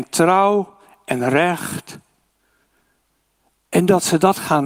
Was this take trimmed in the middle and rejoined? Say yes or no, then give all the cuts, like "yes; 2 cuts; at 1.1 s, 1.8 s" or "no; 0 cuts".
no; 0 cuts